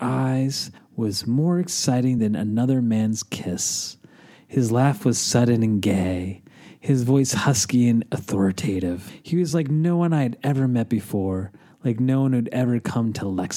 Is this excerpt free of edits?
yes; 0 cuts

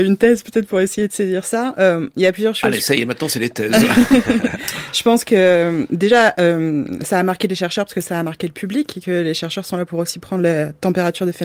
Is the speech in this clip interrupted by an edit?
no; 0 cuts

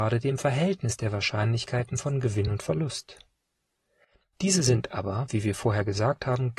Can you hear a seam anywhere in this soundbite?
no; 0 cuts

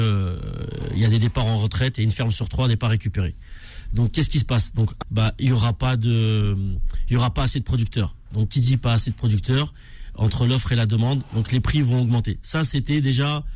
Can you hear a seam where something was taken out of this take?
yes; 1 cut; at 5.0 s

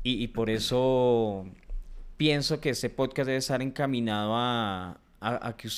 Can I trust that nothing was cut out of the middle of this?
yes; 0 cuts

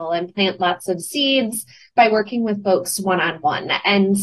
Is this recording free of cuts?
yes; 0 cuts

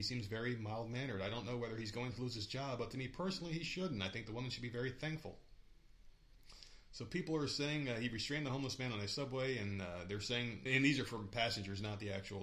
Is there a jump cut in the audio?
yes; 1 cut; at 10.7 s

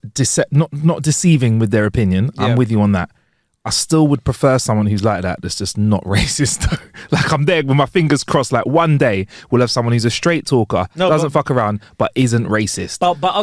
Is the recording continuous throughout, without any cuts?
yes; 0 cuts

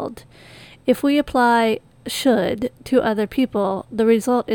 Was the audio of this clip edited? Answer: yes; 1 cut; at 2.7 s

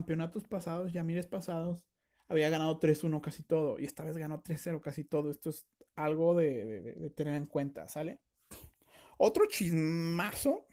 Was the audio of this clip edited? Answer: no; 0 cuts

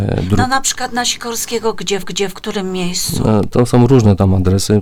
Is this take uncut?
no; 1 cut; at 2.0 s

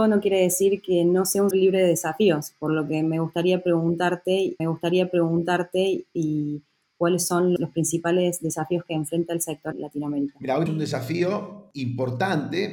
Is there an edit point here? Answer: yes; 5 cuts; at 1.5 s, 4.6 s, 7.6 s, 9.7 s, 10.7 s

